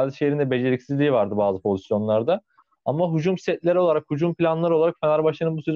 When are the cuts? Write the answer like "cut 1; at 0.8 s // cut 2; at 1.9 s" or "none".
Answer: none